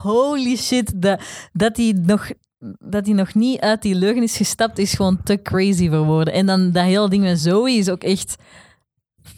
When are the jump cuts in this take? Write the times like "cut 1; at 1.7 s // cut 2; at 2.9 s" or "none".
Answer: none